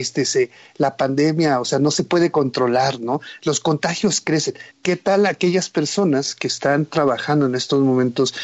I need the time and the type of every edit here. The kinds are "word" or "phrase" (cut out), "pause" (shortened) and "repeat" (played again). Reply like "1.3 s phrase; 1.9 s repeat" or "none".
4.7 s pause